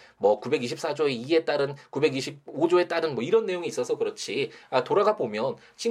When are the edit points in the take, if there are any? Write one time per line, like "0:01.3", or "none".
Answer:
none